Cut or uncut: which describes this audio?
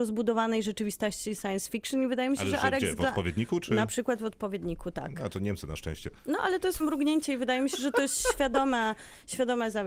cut